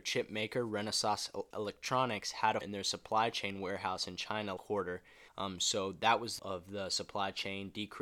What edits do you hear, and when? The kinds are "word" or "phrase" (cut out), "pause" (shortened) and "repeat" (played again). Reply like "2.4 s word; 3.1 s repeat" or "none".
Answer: 1.5 s word; 2.6 s word; 4.6 s word; 5.3 s pause; 6.4 s word